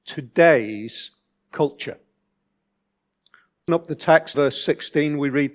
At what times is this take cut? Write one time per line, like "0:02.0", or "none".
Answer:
0:03.7
0:04.3